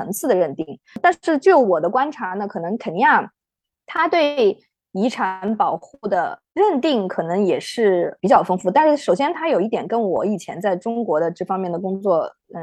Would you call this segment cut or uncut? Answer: uncut